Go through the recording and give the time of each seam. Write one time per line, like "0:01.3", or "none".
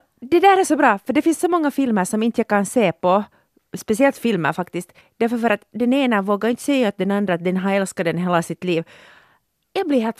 0:05.0